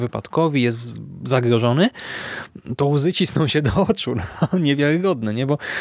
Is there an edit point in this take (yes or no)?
no